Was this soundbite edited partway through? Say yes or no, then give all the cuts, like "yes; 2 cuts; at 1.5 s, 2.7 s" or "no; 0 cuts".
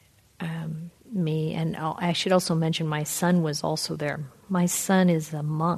no; 0 cuts